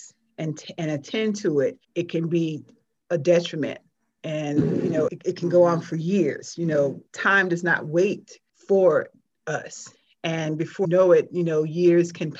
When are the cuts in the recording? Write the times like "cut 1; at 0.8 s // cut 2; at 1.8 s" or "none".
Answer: cut 1; at 1.8 s // cut 2; at 5.1 s // cut 3; at 8.5 s // cut 4; at 10.8 s